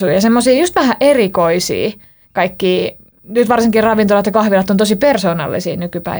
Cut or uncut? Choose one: uncut